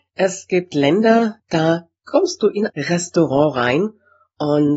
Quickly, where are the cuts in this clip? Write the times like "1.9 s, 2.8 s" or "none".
1.4 s, 2.7 s